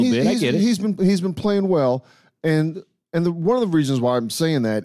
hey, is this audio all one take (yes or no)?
yes